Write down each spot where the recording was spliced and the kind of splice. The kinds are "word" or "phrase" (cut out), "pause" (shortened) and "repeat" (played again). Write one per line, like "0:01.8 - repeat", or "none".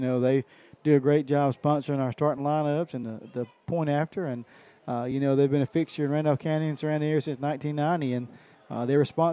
none

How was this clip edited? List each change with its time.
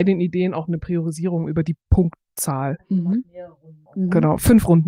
0:01.8 - pause
0:03.9 - pause

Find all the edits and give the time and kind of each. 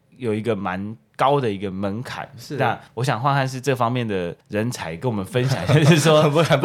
0:02.9 - pause
0:04.4 - pause

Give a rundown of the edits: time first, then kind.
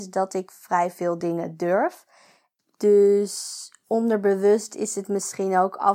none

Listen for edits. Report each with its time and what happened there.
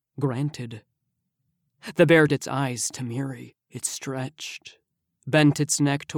0:02.3 - word
0:03.6 - pause

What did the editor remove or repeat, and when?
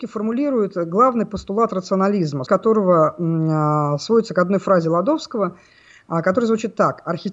0:02.5 - word

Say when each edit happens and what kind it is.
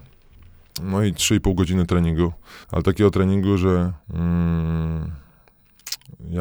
0:02.6 - pause
0:04.0 - pause

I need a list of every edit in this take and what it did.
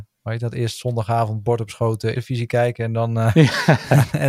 0:02.1 - word

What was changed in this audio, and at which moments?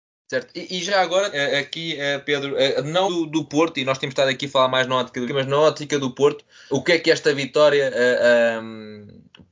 0:01.3 - word
0:03.1 - word
0:05.3 - word
0:06.7 - word

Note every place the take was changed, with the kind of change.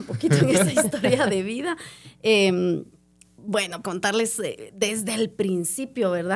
0:03.8 - word

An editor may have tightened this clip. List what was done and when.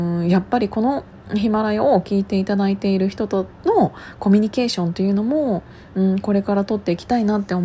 0:03.5 - pause

